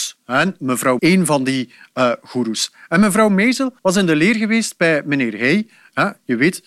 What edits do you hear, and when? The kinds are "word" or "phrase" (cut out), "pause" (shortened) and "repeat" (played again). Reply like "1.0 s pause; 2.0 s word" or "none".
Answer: 1.0 s phrase; 3.8 s pause